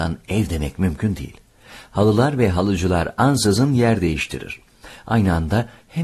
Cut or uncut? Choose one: uncut